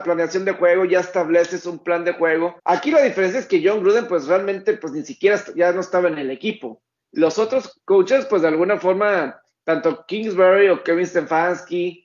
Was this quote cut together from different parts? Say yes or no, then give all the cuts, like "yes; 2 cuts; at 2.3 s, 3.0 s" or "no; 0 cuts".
yes; 1 cut; at 2.6 s